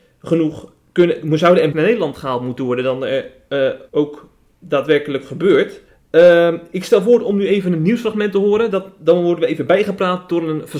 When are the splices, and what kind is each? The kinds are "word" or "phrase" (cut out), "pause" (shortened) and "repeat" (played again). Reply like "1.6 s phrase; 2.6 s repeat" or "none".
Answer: 1.7 s phrase; 3.9 s pause; 5.9 s pause